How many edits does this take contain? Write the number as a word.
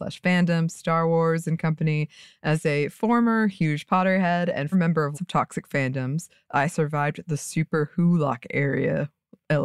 two